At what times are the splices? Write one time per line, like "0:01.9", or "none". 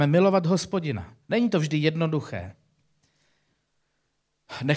0:01.2